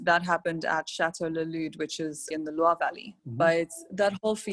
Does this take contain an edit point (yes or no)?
yes